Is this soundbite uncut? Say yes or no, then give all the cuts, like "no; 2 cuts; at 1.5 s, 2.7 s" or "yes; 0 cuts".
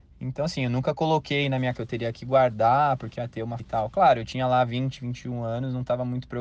no; 3 cuts; at 1.7 s, 3.2 s, 3.6 s